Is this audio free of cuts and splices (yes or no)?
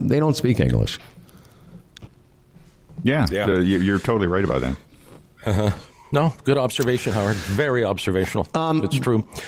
yes